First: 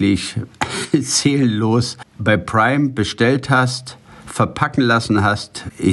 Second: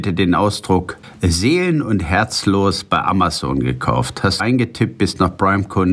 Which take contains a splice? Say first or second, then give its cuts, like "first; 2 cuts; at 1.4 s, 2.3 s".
second; 1 cut; at 4.4 s